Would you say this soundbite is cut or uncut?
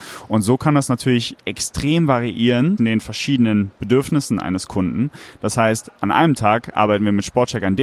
cut